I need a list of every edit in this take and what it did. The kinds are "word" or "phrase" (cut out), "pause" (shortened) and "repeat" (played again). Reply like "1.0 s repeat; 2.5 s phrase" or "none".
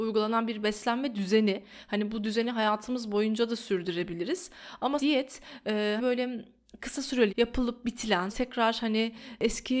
5.0 s word; 6.0 s word; 7.3 s word; 8.3 s word